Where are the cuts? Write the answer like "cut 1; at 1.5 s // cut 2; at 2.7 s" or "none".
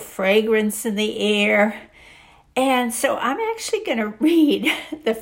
none